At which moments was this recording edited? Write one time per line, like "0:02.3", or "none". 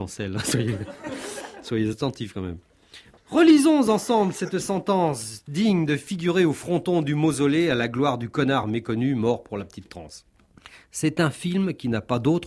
none